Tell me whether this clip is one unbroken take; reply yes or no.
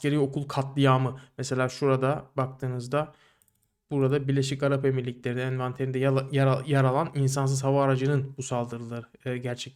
yes